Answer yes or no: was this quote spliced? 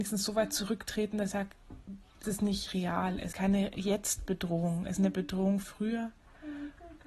yes